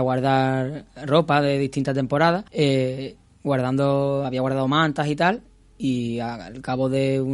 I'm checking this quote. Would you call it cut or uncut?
cut